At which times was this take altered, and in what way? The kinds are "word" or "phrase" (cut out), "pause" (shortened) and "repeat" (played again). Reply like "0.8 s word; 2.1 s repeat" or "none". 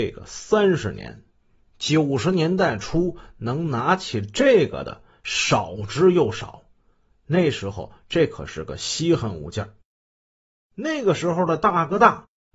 none